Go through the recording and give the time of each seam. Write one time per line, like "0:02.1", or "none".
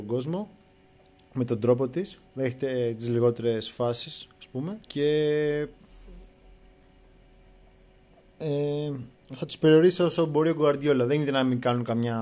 0:02.3
0:04.8

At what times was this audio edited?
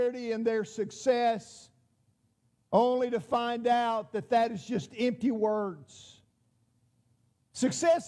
none

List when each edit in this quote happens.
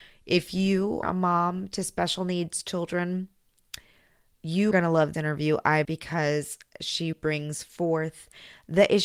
0:01.0
0:04.7
0:05.1
0:05.8
0:07.1

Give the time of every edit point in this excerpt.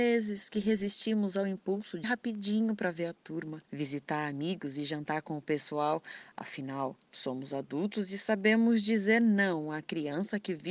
0:02.0
0:03.7
0:07.0

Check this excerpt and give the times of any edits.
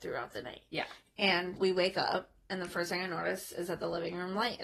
0:01.6

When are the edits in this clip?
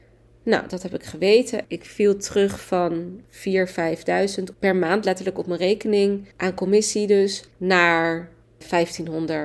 0:04.5
0:06.3
0:07.5

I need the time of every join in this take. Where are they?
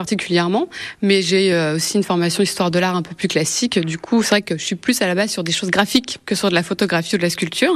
none

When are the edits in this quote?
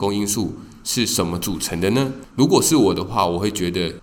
0:02.3

